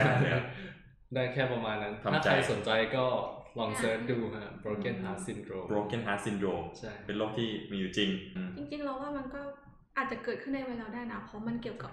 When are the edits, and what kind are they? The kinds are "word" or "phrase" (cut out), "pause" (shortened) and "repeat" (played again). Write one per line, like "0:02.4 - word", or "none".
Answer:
none